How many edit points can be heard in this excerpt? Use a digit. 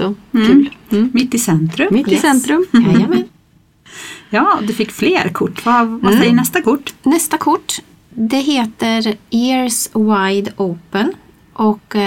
0